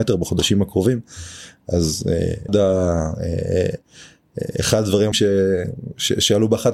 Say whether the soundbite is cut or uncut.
cut